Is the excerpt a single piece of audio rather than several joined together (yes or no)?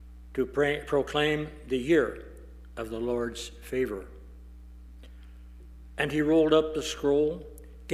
yes